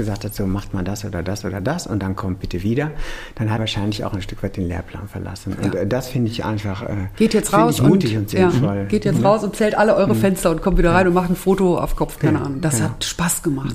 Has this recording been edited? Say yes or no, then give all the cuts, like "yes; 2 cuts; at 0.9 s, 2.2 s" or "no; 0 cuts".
yes; 1 cut; at 3.6 s